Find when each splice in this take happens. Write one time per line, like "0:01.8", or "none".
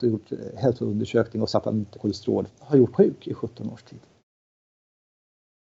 0:01.5
0:01.9
0:02.5
0:02.9